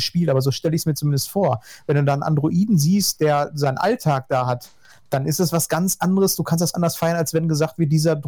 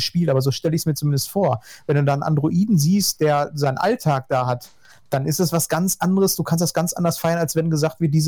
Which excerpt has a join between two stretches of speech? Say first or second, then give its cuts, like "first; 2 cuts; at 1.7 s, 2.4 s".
first; 1 cut; at 6.7 s